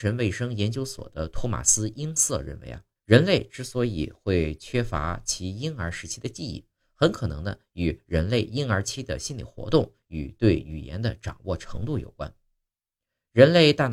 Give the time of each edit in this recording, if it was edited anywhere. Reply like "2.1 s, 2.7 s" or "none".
3.0 s